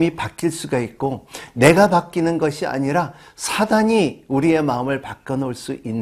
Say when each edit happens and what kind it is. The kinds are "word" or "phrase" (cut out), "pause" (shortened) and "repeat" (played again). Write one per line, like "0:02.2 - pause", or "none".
none